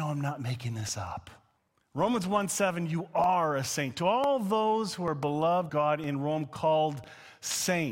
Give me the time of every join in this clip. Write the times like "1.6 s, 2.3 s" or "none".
1.6 s, 5.7 s